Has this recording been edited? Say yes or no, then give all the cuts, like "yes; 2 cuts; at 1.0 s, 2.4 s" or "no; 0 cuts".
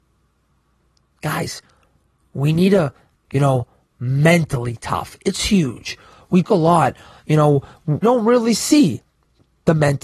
yes; 3 cuts; at 3.2 s, 6.4 s, 8.0 s